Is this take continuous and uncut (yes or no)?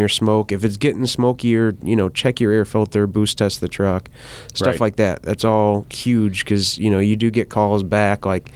yes